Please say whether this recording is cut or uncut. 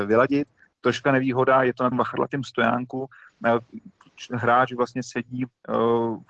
cut